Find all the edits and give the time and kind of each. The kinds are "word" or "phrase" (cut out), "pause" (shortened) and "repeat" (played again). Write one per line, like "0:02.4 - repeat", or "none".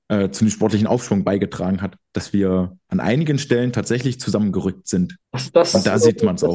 0:02.8 - pause
0:05.2 - pause

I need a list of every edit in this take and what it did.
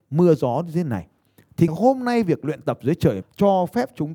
0:01.7 - word
0:03.2 - word

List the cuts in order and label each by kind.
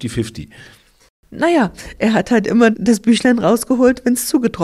0:02.7 - word

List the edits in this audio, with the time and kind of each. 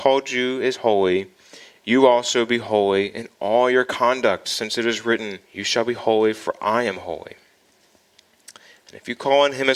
0:05.5 - pause

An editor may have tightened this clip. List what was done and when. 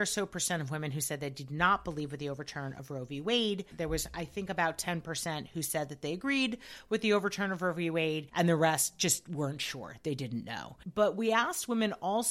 none

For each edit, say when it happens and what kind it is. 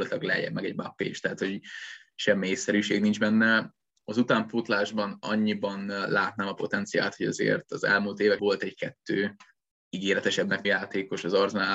0:08.4 - word
0:10.6 - word

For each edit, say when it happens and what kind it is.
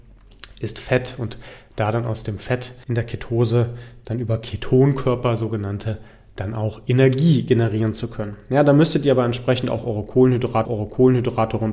0:02.8 - pause
0:10.6 - repeat

